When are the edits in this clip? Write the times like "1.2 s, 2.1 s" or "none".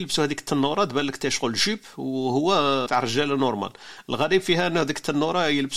2.9 s